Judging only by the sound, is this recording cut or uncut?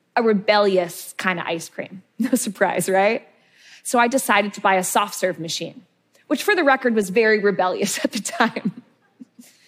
uncut